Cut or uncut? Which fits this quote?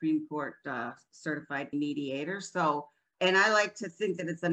cut